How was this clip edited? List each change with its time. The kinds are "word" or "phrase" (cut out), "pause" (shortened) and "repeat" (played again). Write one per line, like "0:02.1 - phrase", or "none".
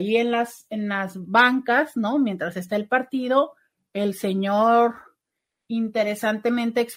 none